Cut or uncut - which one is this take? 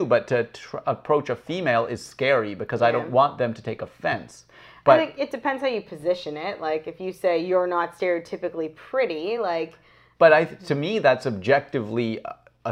uncut